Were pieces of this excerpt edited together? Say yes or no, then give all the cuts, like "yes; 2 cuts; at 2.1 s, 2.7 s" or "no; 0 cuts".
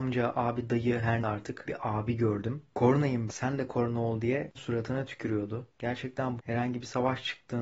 yes; 5 cuts; at 1.2 s, 1.7 s, 3.3 s, 4.5 s, 6.4 s